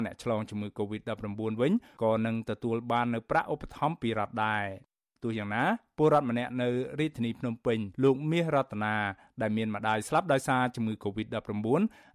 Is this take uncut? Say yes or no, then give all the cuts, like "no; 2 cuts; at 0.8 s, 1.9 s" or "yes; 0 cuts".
no; 1 cut; at 7.9 s